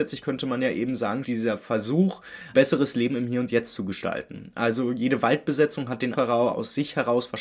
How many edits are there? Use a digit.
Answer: 4